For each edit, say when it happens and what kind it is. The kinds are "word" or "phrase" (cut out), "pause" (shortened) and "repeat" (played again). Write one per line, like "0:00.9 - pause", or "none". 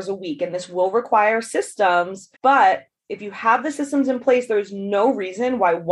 0:02.4 - pause

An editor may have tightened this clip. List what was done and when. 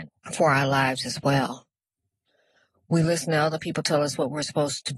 none

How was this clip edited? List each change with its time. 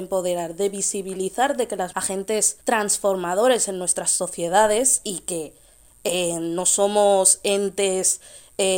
0:01.9 - phrase
0:02.6 - pause

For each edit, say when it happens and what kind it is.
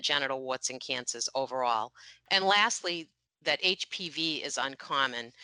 none

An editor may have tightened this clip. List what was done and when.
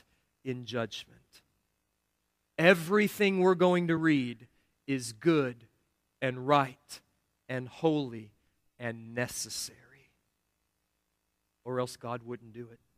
none

